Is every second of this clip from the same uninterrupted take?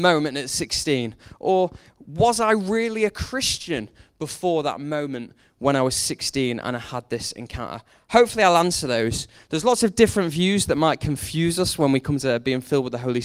yes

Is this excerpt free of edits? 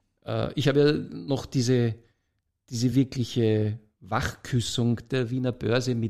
yes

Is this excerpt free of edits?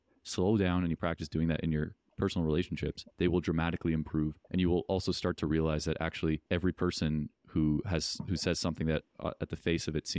no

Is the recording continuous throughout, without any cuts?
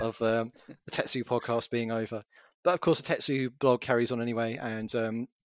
yes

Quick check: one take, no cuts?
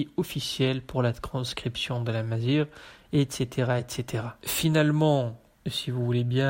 yes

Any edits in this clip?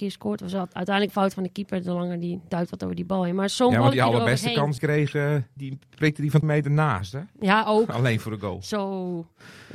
yes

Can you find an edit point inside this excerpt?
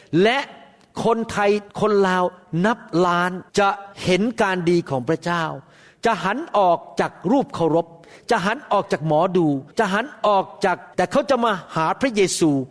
yes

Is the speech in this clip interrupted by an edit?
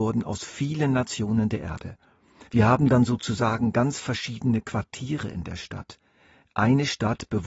yes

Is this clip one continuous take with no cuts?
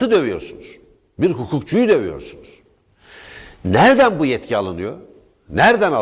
yes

